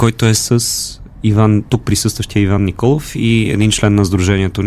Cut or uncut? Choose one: uncut